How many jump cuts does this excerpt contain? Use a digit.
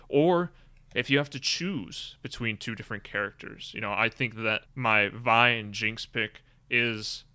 1